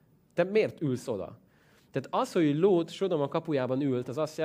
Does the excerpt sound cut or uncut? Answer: uncut